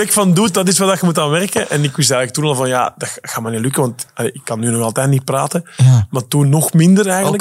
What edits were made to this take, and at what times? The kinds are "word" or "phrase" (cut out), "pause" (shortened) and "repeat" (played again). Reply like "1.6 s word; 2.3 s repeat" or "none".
none